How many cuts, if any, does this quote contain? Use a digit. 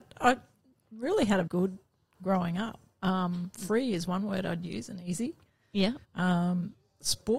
2